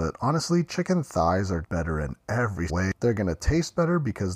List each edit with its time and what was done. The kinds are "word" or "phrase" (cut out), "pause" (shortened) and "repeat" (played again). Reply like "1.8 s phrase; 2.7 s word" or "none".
1.6 s word; 2.7 s word